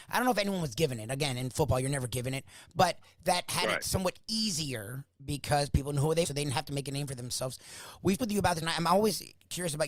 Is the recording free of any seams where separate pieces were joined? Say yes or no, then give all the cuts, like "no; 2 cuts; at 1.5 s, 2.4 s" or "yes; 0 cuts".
no; 3 cuts; at 6.2 s, 8.2 s, 8.6 s